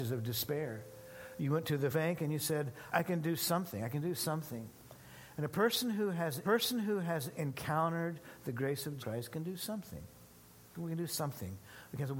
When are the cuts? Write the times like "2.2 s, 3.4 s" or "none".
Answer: 1.9 s, 2.9 s, 6.4 s, 9.0 s

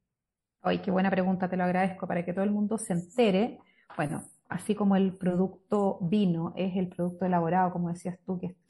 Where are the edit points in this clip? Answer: none

